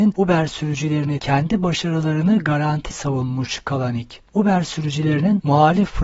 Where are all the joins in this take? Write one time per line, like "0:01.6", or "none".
0:01.2
0:02.9